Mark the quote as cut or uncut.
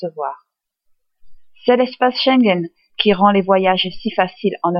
uncut